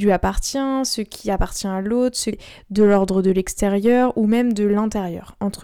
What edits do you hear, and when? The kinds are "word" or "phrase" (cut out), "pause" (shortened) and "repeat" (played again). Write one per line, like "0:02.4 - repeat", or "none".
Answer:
0:02.3 - word